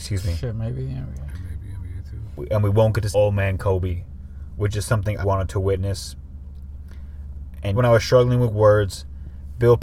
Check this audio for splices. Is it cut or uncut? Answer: cut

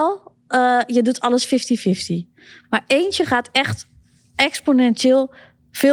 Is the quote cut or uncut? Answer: uncut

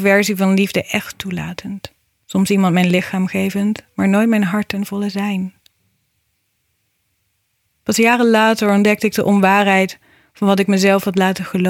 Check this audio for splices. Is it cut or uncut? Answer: uncut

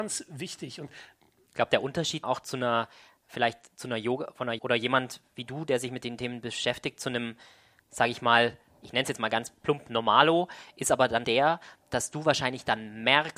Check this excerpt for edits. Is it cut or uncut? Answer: cut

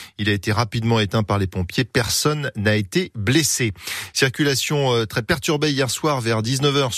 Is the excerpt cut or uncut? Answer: uncut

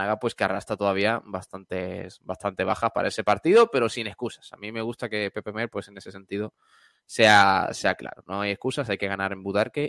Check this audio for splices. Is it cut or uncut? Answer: uncut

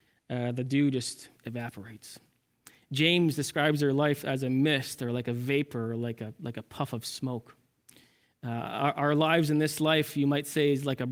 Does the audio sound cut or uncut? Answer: uncut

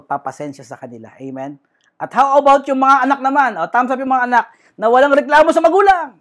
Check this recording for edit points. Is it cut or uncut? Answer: uncut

